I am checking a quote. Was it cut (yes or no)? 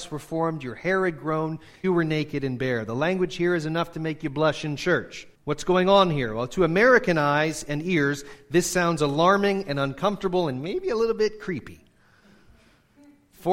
yes